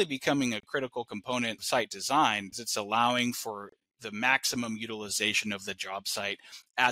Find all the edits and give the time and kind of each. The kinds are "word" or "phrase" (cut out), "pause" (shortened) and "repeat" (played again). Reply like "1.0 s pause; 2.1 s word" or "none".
1.6 s word; 2.5 s word